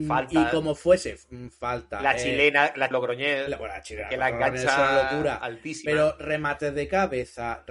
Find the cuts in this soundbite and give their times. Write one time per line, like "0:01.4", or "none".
0:02.9